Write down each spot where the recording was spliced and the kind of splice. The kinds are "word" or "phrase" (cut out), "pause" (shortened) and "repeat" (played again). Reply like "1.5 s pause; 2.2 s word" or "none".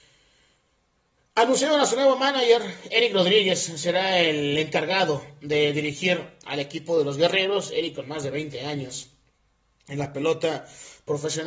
none